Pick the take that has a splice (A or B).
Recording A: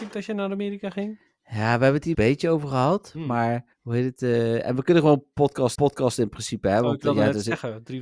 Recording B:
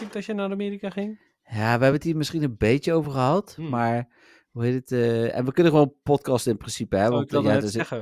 A